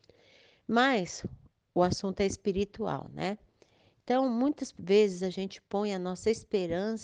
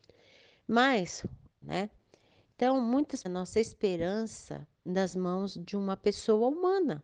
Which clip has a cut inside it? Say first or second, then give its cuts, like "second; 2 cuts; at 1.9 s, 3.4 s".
second; 3 cuts; at 1.6 s, 3.2 s, 4.7 s